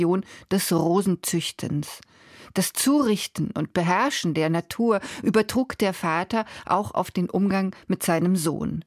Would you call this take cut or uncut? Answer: uncut